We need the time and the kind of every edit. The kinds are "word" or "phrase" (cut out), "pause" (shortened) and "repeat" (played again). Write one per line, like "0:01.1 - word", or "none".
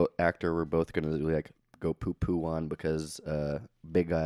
0:01.6 - pause